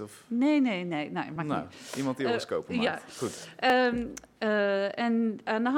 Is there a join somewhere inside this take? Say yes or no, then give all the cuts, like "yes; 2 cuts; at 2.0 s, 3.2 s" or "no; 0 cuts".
no; 0 cuts